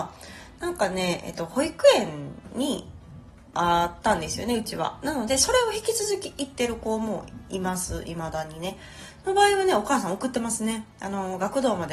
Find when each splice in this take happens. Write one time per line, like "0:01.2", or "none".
0:10.9